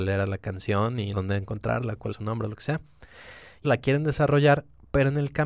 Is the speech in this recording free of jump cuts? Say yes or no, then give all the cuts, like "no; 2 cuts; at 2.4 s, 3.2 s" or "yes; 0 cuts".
no; 3 cuts; at 1.1 s, 2.1 s, 3.6 s